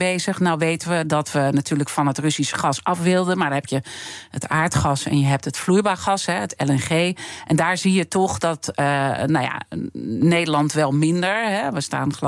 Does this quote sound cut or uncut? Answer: uncut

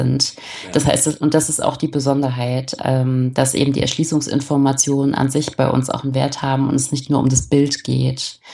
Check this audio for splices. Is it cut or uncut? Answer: uncut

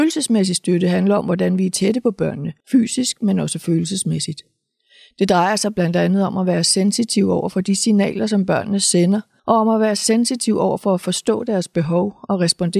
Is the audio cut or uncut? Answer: cut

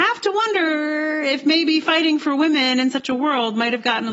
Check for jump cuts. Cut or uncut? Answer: uncut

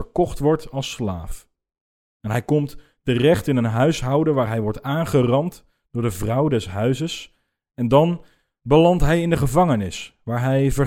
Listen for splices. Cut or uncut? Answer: uncut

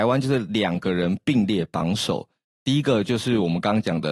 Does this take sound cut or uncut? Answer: uncut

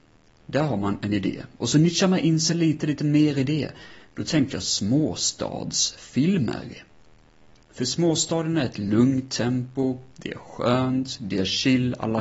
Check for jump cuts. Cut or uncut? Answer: uncut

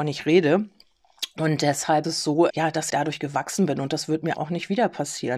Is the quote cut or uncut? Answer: cut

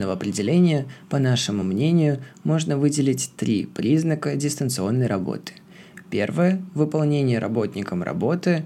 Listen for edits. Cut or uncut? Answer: uncut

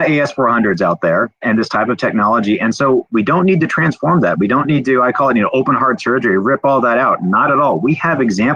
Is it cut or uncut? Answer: uncut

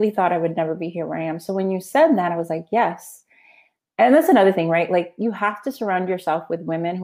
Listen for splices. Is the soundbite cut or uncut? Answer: uncut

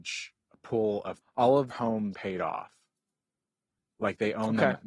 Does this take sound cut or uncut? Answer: cut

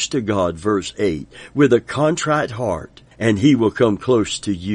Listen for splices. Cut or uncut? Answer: cut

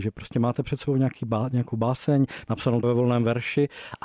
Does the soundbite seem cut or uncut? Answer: cut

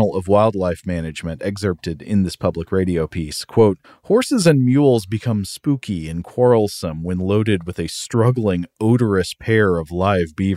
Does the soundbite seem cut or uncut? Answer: cut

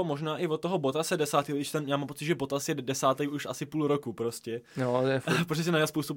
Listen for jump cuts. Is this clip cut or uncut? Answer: uncut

